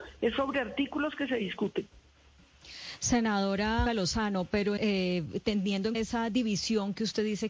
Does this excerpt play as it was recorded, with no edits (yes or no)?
no